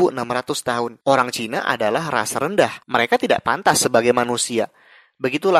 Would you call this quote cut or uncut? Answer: cut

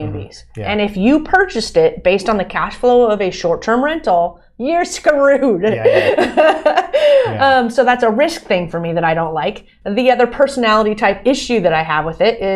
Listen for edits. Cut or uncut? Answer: uncut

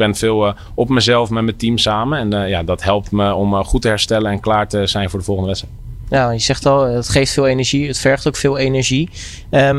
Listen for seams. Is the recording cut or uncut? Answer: uncut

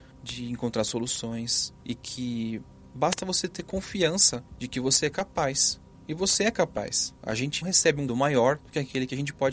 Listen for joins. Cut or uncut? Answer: cut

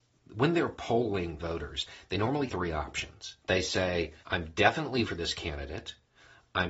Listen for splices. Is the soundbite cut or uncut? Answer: cut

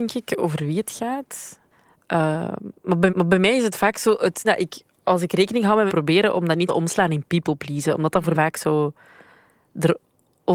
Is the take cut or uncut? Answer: cut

